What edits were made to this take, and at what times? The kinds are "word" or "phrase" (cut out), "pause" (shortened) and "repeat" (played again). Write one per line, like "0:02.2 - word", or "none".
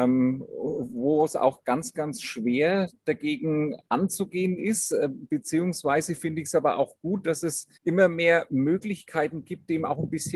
0:07.7 - pause